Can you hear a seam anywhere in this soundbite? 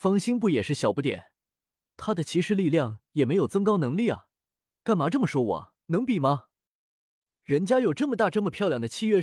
yes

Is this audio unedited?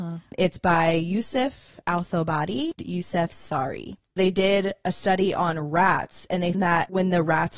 no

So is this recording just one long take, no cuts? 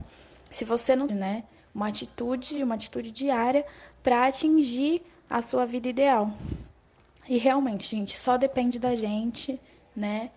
no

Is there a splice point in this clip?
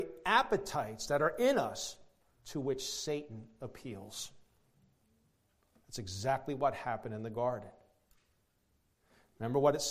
no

